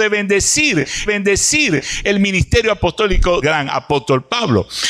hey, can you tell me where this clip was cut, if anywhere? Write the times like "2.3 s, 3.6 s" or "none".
1.1 s, 3.4 s